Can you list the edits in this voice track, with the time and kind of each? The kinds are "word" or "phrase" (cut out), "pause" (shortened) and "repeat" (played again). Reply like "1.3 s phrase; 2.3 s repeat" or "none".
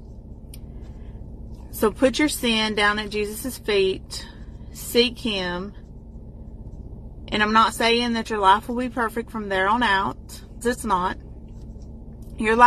10.6 s word